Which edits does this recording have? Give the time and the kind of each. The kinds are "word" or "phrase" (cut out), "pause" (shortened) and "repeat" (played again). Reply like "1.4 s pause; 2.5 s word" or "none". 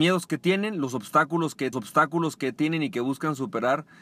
1.7 s repeat